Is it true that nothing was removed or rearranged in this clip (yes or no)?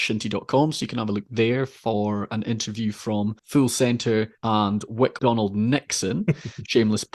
no